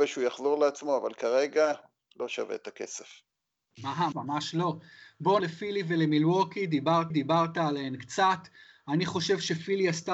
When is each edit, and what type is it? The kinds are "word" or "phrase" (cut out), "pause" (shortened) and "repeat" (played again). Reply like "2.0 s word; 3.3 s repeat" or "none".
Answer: 4.1 s word; 5.4 s word; 7.1 s repeat